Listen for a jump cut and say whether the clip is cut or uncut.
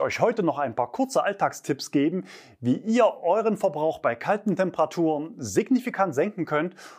uncut